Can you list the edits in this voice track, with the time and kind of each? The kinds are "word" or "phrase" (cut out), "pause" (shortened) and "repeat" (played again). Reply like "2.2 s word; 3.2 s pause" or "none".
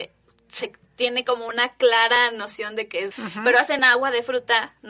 3.1 s word